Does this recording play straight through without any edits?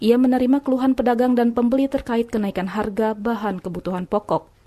yes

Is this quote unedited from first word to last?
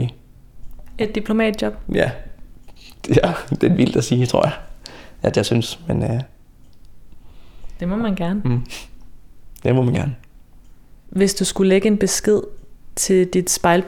yes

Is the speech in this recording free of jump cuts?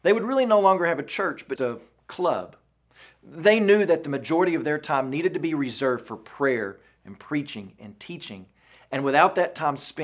no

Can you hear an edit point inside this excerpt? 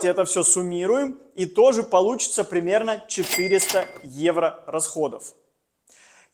no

